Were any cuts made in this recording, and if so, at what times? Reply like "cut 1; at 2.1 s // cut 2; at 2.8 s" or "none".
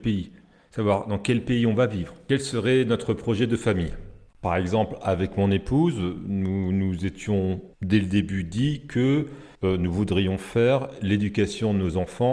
cut 1; at 7.7 s // cut 2; at 9.5 s